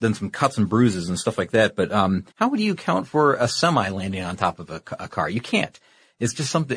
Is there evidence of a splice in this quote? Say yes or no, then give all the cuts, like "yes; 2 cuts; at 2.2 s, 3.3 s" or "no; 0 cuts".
yes; 1 cut; at 2.3 s